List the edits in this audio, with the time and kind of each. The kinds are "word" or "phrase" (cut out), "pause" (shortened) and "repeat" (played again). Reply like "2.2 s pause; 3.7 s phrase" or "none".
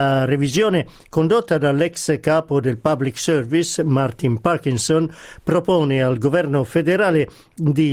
none